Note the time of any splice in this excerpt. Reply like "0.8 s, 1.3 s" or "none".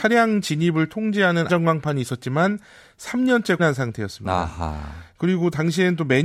1.5 s, 3.6 s